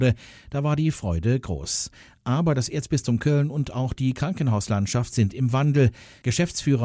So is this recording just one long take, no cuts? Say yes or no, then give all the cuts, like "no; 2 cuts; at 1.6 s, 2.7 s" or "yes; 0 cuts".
yes; 0 cuts